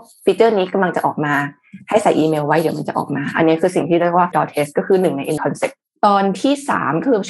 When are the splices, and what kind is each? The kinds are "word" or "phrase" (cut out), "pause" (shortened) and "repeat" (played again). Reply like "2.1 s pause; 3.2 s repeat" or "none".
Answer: 4.3 s word; 5.4 s word